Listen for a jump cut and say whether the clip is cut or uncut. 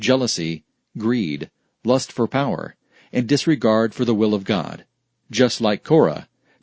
uncut